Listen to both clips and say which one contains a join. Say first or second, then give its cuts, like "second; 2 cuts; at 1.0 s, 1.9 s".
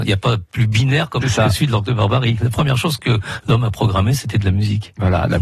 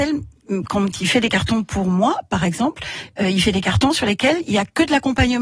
first; 1 cut; at 1.2 s